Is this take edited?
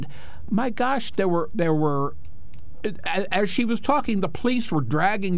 no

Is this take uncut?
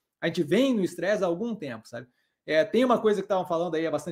yes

